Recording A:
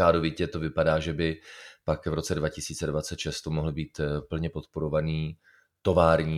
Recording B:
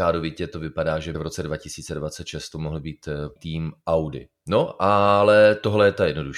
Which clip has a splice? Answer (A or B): B